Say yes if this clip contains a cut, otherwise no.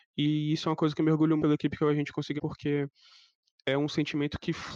yes